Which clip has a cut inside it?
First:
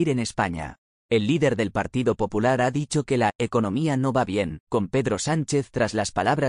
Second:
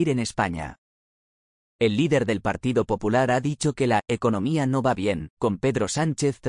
first; 1 cut; at 0.9 s

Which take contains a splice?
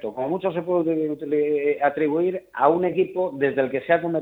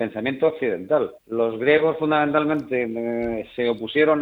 second; 1 cut; at 1.2 s

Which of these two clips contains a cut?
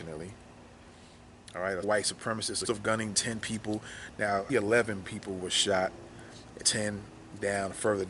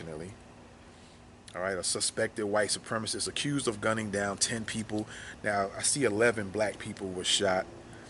first; 6 cuts; at 1.8 s, 2.6 s, 3.1 s, 4.5 s, 5.0 s, 6.6 s

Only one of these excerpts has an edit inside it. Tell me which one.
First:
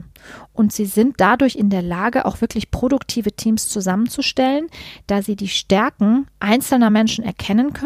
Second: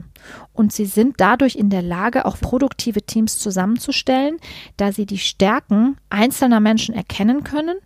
second; 1 cut; at 2.4 s

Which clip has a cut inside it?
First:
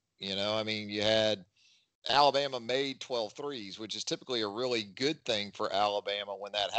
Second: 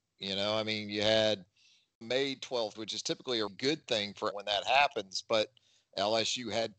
second; 4 cuts; at 2.0 s, 2.7 s, 3.5 s, 4.3 s

